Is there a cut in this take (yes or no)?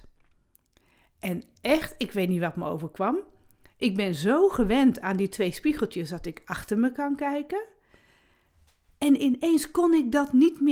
no